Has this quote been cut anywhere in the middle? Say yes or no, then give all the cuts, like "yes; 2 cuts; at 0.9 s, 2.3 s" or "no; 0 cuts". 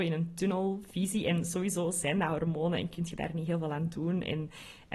no; 0 cuts